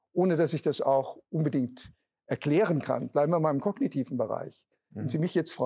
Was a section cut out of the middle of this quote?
no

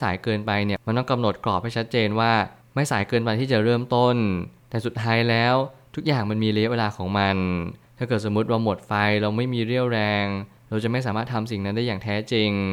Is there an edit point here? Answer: no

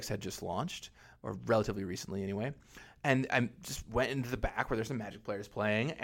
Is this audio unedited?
yes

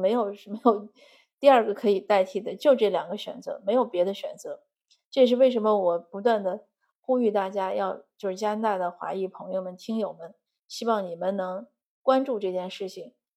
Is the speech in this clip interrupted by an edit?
no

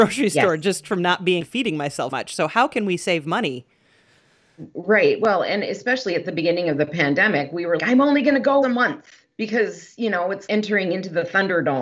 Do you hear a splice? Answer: yes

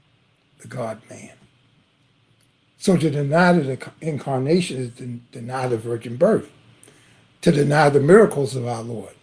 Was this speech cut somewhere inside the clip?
no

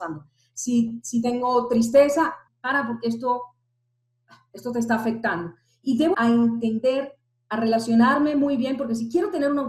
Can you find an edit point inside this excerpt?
yes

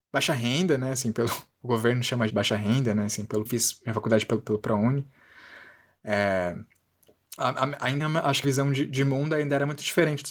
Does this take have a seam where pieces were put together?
yes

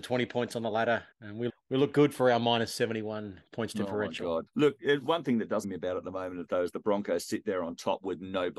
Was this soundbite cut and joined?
yes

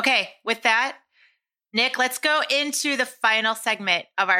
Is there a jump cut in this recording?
no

